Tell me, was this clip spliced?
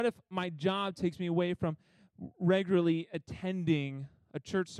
no; 0 cuts

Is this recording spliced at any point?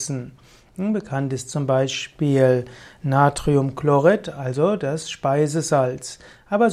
no; 0 cuts

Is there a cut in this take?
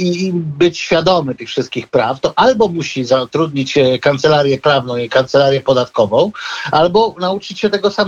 no; 0 cuts

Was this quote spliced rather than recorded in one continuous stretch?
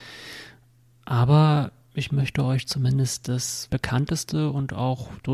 yes; 1 cut; at 3.7 s

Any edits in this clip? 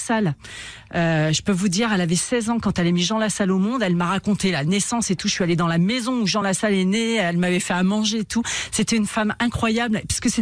no; 0 cuts

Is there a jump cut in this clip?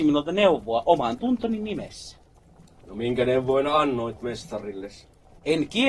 no; 0 cuts

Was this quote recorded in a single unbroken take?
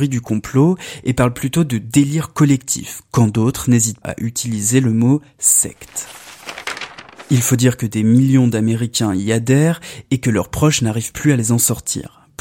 no; 1 cut; at 4.0 s

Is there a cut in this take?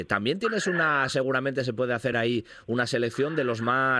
no; 0 cuts

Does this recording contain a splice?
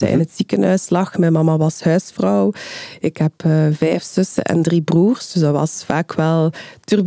no; 0 cuts

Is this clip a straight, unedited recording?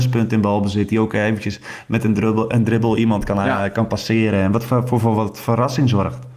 yes; 0 cuts

